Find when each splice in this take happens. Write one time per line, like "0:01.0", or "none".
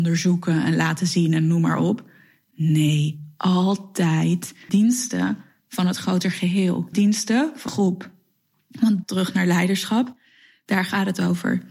0:04.7
0:06.9
0:07.7
0:09.0

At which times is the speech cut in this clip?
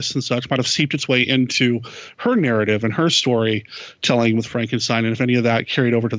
none

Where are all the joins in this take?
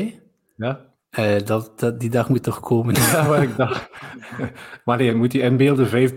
0:00.9

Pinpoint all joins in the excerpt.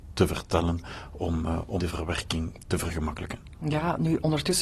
0:01.8

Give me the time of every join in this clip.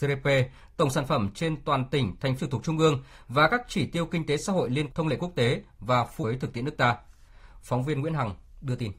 0:02.4
0:04.9
0:06.2

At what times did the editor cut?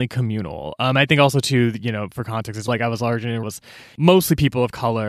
0:02.7
0:03.4

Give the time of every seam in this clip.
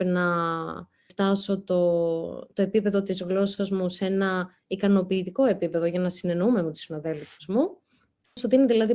none

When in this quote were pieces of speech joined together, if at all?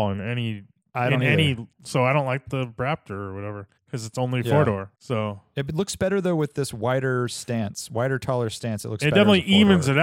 0:01.7
0:03.8
0:04.9

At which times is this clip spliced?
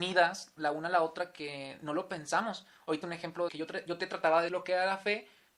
0:03.0
0:03.5
0:04.5

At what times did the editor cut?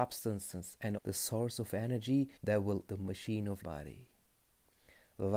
0:01.0
0:02.4
0:02.9
0:03.6

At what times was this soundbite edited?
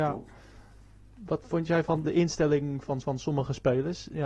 0:01.4
0:02.0
0:03.0

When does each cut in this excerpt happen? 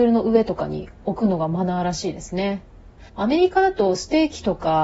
0:03.1

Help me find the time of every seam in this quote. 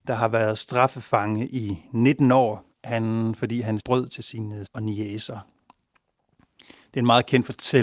0:02.7
0:03.8
0:04.7

